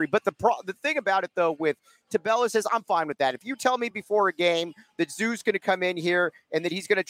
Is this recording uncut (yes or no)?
yes